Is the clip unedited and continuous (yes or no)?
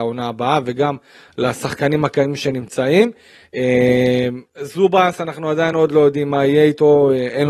yes